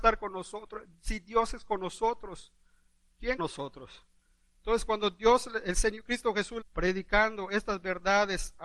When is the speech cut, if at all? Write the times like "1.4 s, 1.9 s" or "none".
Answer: 3.4 s, 6.6 s